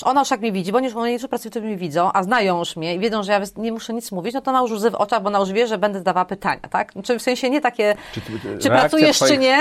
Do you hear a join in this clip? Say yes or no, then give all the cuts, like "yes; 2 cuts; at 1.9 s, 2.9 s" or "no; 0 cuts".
no; 0 cuts